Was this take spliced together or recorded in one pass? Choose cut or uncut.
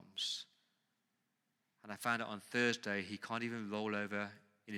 uncut